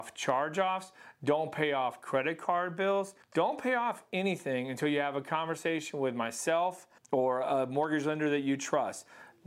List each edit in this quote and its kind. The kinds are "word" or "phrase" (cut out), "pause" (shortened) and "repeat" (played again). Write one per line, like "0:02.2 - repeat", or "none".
0:03.2 - pause
0:07.0 - pause